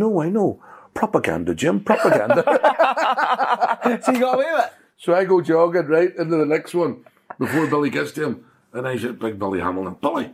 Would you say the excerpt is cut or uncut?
uncut